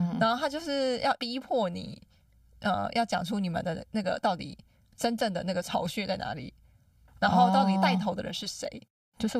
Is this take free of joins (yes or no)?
yes